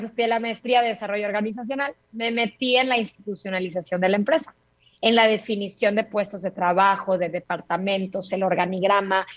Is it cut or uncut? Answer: uncut